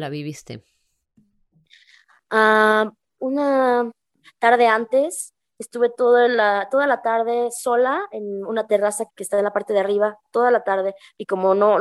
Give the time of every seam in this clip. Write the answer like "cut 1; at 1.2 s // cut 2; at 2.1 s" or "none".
cut 1; at 3.2 s // cut 2; at 9.1 s